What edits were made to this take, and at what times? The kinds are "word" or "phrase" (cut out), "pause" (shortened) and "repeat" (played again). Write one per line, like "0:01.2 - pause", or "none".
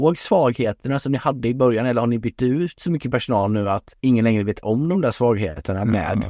0:04.0 - pause